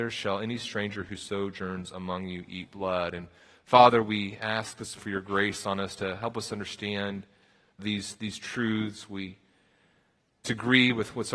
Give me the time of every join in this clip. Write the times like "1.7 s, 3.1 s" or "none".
5.0 s, 7.8 s, 10.4 s